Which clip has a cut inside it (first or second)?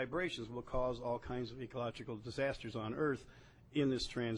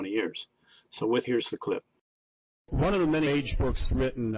second